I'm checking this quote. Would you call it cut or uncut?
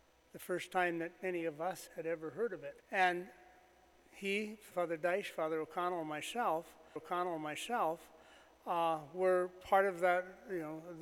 cut